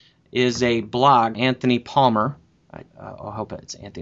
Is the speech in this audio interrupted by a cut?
yes; 2 cuts; at 1.3 s, 2.9 s

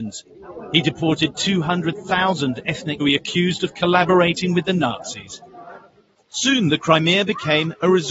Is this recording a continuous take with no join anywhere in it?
no; 2 cuts; at 3.0 s, 6.7 s

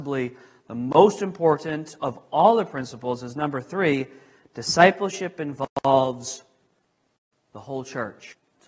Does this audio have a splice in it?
no; 0 cuts

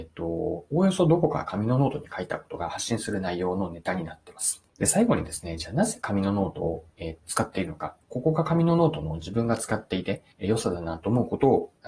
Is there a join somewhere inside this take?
yes; 4 cuts; at 4.7 s, 7.2 s, 8.0 s, 10.3 s

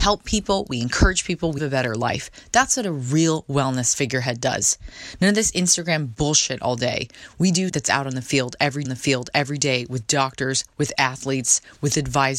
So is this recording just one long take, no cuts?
no; 3 cuts; at 1.6 s, 7.7 s, 8.8 s

